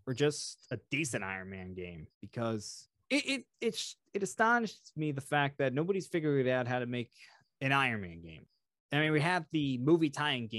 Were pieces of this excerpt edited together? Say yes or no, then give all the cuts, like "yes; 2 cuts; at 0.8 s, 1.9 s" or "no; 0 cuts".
yes; 1 cut; at 2.1 s